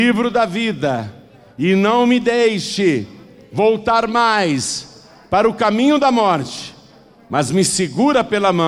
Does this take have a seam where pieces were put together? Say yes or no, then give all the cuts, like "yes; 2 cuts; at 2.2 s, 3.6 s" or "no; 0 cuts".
no; 0 cuts